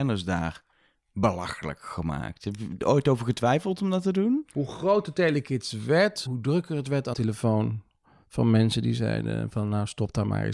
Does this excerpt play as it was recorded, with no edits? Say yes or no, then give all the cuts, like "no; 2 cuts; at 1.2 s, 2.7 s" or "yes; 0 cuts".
no; 2 cuts; at 6.3 s, 7.1 s